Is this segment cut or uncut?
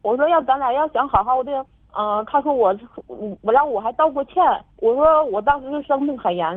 uncut